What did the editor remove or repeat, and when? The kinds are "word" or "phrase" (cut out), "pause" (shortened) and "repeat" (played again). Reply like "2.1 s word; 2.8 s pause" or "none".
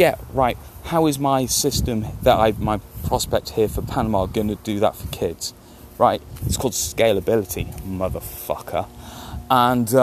none